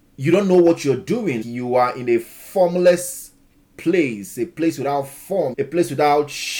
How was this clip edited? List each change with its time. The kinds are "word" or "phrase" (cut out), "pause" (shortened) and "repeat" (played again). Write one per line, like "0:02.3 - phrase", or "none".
0:01.4 - word
0:03.6 - pause
0:05.5 - word